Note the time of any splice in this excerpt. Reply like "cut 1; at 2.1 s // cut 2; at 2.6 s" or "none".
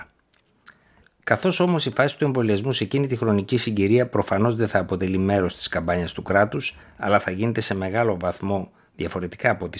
cut 1; at 6.8 s